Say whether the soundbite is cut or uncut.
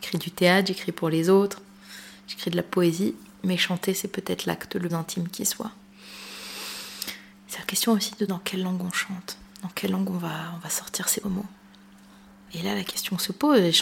cut